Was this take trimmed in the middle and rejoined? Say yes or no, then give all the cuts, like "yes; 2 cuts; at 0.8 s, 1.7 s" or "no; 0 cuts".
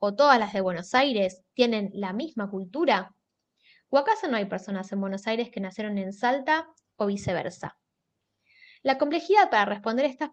no; 0 cuts